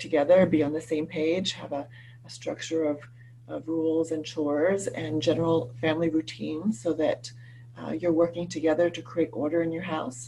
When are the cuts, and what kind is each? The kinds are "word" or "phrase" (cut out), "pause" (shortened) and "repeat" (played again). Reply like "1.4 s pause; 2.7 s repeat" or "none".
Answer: none